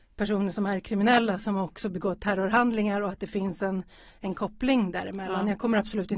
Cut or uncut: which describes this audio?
uncut